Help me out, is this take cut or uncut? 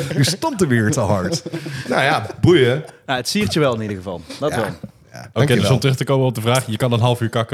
cut